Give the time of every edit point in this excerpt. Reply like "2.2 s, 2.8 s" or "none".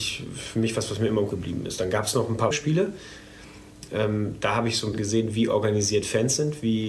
1.3 s, 2.5 s, 4.9 s